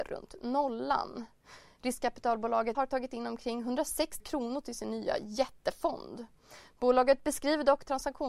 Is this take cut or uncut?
cut